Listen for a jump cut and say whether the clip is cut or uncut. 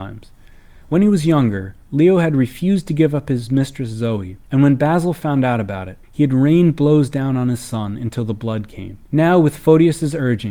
cut